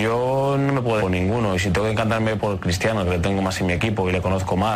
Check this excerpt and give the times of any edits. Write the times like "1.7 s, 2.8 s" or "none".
1.0 s, 2.4 s